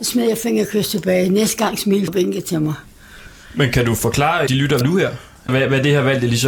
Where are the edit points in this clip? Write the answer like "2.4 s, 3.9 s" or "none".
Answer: 2.1 s, 4.5 s, 4.8 s, 5.5 s